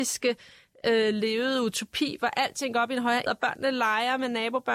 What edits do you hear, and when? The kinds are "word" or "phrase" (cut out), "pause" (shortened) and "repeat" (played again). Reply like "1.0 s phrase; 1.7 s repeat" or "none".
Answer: 3.3 s word